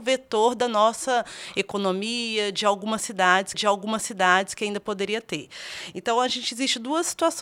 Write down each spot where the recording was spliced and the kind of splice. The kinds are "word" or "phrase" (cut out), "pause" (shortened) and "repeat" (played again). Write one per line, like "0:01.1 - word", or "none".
0:03.5 - repeat